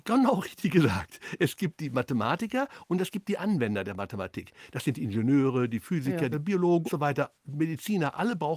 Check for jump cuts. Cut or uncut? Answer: cut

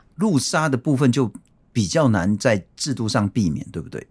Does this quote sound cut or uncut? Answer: uncut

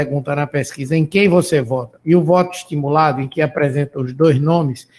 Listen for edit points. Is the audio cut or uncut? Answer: uncut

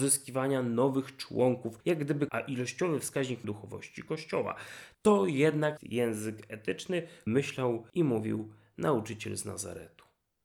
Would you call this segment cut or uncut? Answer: cut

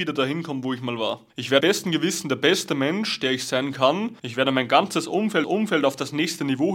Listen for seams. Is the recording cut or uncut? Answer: cut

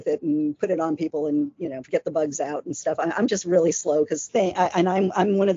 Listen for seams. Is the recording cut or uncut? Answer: uncut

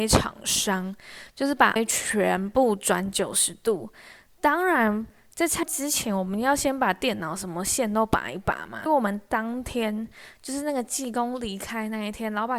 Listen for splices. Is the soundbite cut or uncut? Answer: cut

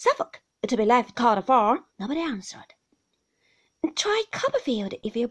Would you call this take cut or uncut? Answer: cut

